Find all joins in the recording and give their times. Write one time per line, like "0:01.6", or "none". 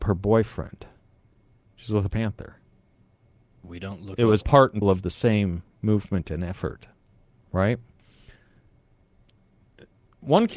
0:01.3
0:02.1
0:04.4
0:04.8